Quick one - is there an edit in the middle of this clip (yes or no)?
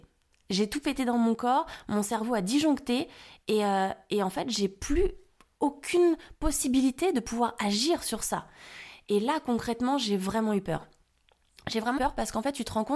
yes